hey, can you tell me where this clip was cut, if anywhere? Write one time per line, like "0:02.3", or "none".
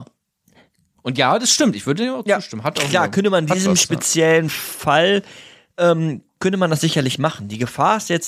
none